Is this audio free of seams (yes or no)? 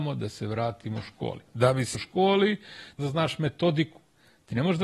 no